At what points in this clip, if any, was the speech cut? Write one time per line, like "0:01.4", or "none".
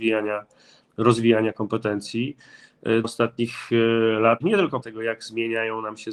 0:03.0
0:04.4
0:04.8